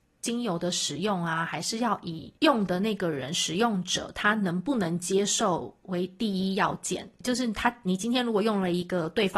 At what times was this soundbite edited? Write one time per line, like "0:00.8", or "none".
0:02.4
0:07.2